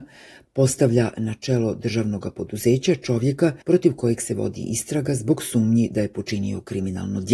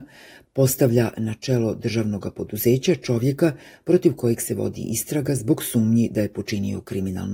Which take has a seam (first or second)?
first